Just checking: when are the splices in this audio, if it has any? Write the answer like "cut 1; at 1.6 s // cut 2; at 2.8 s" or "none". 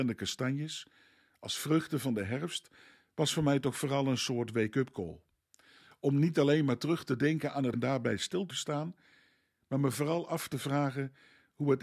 cut 1; at 7.7 s // cut 2; at 8.5 s